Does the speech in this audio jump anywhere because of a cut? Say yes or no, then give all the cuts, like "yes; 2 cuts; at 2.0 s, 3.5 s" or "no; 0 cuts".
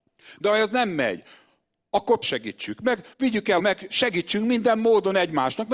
yes; 3 cuts; at 2.2 s, 3.1 s, 3.6 s